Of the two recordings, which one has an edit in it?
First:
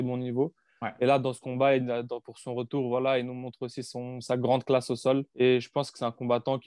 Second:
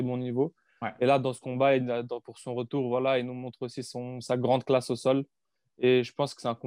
first; 1 cut; at 5.3 s

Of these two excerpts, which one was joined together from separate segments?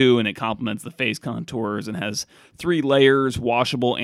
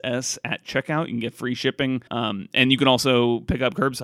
second; 1 cut; at 2.1 s

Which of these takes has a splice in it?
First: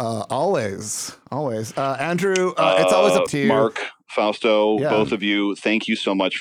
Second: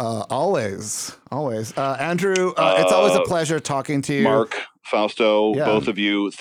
first; 1 cut; at 3.3 s

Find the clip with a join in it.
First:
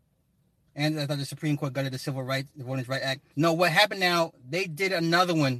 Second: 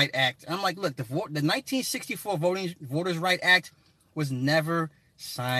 first; 1 cut; at 3.3 s

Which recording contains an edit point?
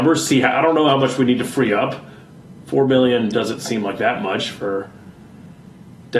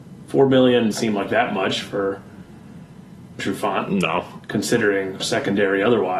second; 3 cuts; at 0.9 s, 3.4 s, 5.2 s

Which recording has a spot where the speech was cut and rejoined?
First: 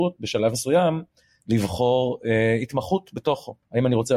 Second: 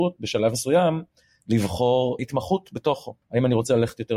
second; 1 cut; at 2.2 s

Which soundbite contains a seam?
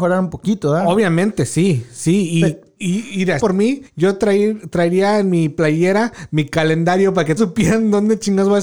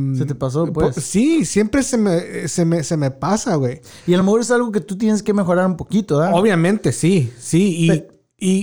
first; 4 cuts; at 2.8 s, 3.4 s, 3.9 s, 7.4 s

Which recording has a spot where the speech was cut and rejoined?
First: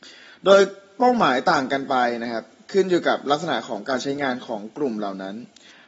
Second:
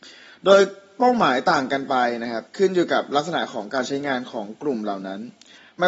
second; 1 cut; at 2.5 s

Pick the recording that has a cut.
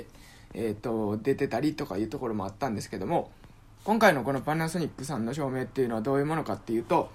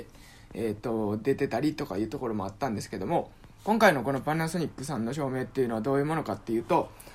second; 1 cut; at 3.6 s

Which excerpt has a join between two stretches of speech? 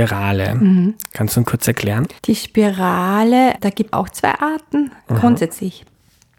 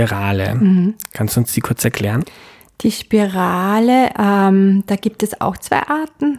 first; 5 cuts; at 1.4 s, 2.2 s, 3.6 s, 3.9 s, 5.0 s

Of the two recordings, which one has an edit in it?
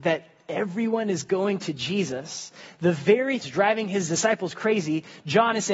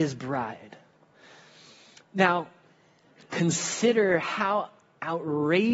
first; 1 cut; at 3.4 s

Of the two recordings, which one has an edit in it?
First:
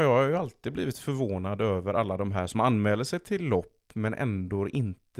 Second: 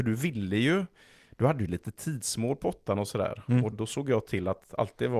second; 1 cut; at 3.7 s

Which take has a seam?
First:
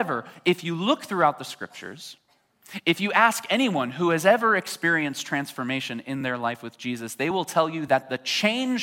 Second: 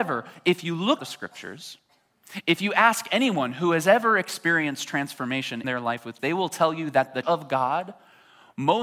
second; 4 cuts; at 1.0 s, 5.6 s, 6.2 s, 7.2 s

